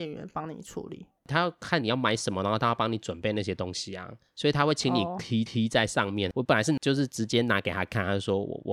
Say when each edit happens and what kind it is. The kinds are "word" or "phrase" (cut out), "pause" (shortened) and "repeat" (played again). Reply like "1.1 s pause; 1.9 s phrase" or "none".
5.5 s repeat